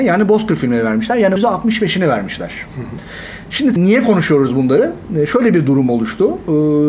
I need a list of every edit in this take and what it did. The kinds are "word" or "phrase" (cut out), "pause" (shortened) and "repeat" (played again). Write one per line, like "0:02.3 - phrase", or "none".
0:01.4 - word
0:03.8 - word